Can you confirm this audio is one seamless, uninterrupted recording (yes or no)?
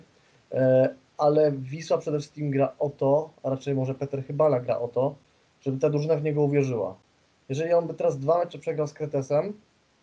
yes